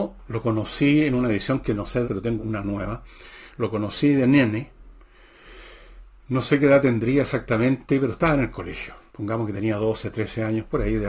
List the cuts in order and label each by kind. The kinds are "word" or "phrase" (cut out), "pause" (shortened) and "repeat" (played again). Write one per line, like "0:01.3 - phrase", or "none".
0:02.0 - phrase
0:02.4 - word
0:09.1 - pause